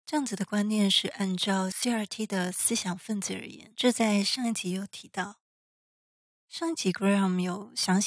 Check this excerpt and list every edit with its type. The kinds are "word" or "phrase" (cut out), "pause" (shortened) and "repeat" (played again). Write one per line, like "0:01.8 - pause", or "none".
none